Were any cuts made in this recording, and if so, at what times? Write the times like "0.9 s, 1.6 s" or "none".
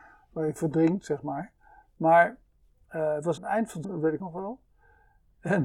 3.4 s, 3.8 s, 4.2 s